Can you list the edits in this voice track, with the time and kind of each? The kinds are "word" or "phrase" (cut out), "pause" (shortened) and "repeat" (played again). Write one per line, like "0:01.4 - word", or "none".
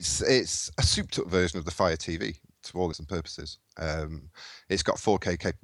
0:02.9 - word